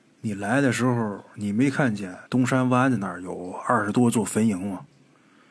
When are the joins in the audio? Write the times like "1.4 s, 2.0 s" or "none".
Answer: 2.3 s